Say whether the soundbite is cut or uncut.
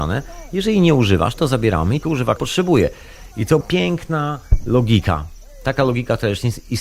cut